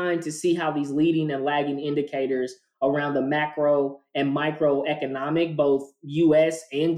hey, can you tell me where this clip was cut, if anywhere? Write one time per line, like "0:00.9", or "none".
none